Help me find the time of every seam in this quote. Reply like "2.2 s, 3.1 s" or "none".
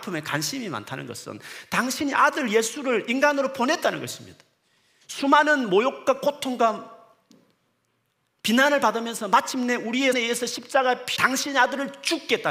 10.1 s, 11.2 s